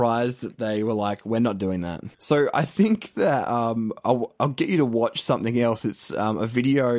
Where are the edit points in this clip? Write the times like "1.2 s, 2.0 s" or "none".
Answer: 2.1 s